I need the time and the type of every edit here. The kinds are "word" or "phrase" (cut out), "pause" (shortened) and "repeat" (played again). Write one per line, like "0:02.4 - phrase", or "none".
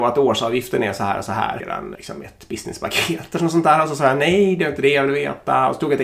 0:01.6 - word
0:01.9 - word